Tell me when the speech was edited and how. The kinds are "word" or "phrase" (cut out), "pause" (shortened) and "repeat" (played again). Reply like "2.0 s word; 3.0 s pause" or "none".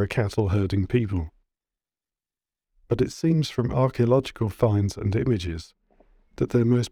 none